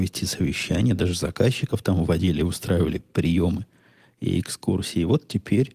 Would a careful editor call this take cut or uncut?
uncut